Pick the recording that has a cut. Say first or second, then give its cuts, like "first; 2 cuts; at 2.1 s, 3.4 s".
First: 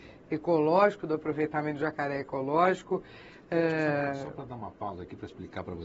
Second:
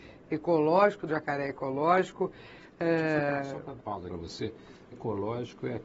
second; 4 cuts; at 1.1 s, 3.8 s, 4.1 s, 4.9 s